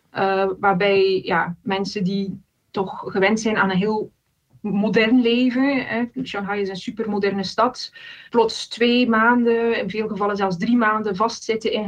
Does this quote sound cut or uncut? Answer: cut